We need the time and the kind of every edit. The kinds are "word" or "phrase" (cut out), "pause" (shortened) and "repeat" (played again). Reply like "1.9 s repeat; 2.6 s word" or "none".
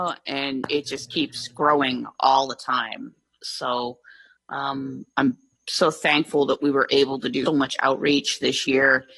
7.5 s word